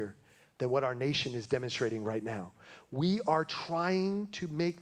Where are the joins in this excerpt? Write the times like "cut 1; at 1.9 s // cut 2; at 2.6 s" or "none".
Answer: none